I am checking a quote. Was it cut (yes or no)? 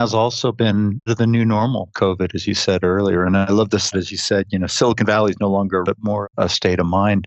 yes